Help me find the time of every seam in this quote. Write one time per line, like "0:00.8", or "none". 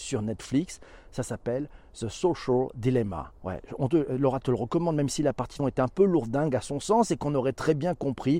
0:03.4
0:05.6